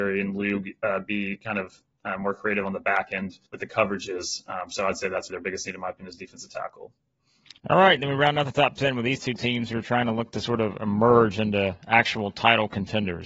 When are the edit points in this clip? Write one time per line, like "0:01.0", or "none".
0:03.5
0:05.3
0:07.6